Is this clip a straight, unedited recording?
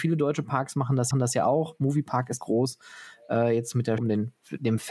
no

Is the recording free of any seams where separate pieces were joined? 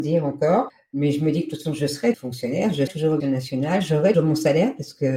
no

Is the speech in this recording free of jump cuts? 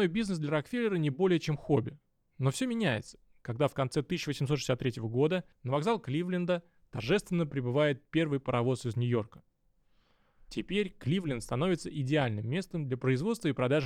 no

